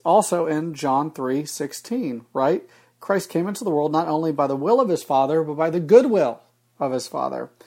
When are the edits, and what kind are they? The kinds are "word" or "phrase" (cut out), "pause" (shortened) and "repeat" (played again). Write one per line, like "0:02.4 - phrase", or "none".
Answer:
none